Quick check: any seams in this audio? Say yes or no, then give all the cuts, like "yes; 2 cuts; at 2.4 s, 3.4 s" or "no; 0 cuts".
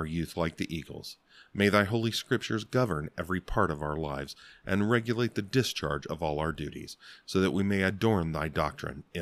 no; 0 cuts